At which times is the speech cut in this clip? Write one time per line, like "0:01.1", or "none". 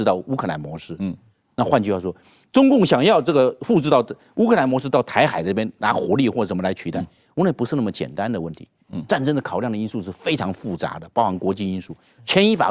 none